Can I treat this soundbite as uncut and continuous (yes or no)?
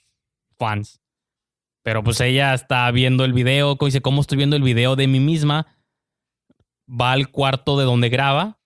yes